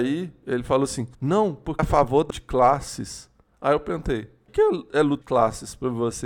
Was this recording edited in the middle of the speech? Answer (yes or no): yes